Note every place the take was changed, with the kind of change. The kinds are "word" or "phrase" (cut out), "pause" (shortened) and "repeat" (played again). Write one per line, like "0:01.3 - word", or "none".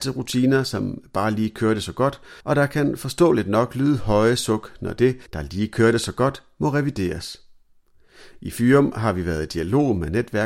0:02.4 - pause
0:05.3 - pause

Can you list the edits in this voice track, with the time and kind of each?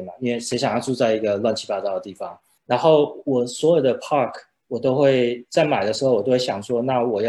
0:02.6 - pause

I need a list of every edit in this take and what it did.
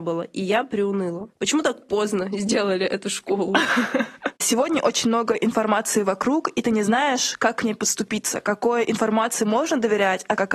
0:04.4 - pause

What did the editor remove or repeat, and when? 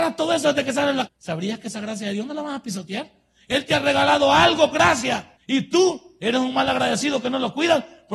0:01.1 - word
0:04.7 - word
0:05.4 - pause

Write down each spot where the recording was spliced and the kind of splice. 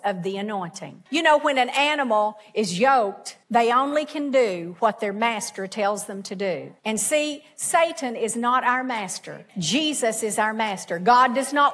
0:01.1 - pause
0:03.4 - pause
0:06.8 - pause
0:09.5 - pause

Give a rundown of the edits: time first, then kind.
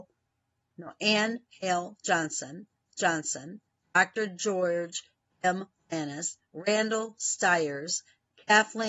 0:02.9 - repeat

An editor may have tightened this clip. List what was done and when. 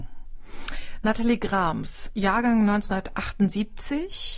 0:02.1 - phrase

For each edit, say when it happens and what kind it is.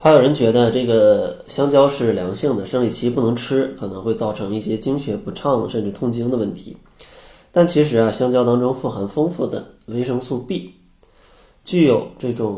none

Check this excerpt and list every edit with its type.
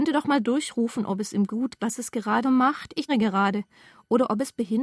0:01.8 - word
0:02.4 - phrase
0:03.1 - word

